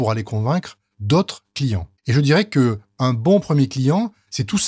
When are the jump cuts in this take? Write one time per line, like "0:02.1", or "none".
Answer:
0:02.0